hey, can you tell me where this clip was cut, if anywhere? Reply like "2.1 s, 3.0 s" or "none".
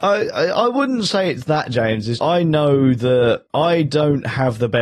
2.2 s